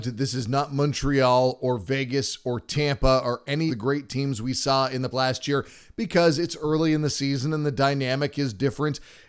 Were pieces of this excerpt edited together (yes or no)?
yes